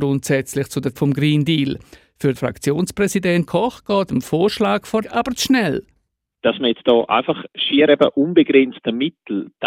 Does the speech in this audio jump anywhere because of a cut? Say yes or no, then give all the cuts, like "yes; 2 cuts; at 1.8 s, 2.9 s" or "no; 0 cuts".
yes; 6 cuts; at 1.0 s, 2.4 s, 3.5 s, 4.1 s, 5.0 s, 7.5 s